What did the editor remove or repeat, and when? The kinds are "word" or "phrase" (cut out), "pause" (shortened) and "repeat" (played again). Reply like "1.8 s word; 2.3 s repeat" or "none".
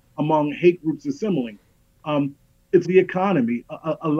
2.8 s word